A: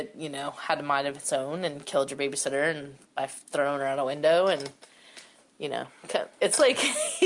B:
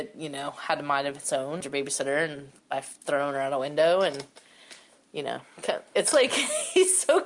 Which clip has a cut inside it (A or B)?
B